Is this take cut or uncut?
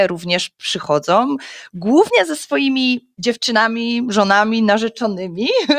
uncut